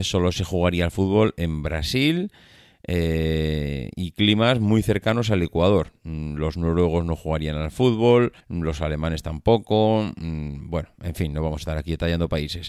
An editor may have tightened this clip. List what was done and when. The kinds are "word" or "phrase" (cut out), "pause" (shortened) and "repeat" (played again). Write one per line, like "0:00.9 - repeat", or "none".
0:08.4 - pause